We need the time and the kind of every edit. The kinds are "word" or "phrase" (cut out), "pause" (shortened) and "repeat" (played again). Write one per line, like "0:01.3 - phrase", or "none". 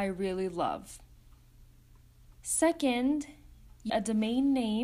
0:02.3 - pause
0:03.9 - word

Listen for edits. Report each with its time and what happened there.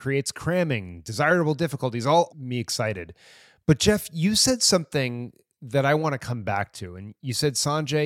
0:02.3 - phrase

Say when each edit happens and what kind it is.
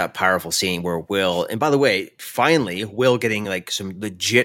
none

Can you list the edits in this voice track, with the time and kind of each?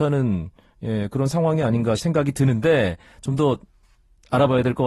0:02.0 - word

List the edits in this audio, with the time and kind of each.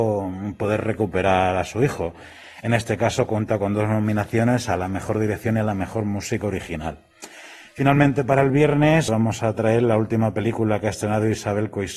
0:09.1 - word

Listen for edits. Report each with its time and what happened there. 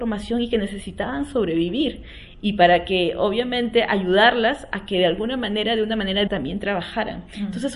0:06.3 - word

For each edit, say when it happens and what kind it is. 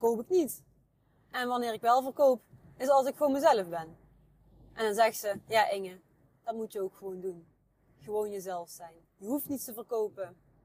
0:09.0 - pause

